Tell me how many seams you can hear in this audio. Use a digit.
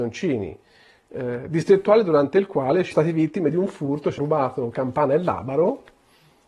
2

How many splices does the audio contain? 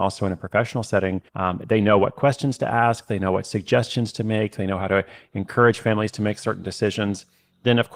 1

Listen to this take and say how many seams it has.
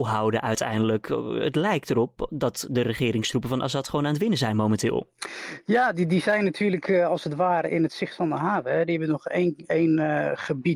0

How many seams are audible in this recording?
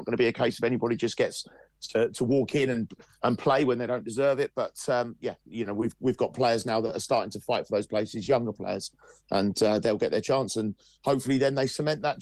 0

